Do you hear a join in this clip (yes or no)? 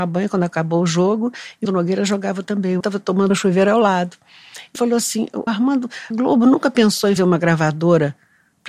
yes